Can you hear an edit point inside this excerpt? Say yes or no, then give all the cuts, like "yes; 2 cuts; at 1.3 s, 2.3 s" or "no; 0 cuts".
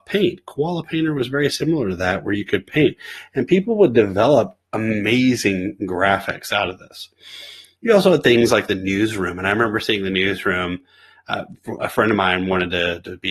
no; 0 cuts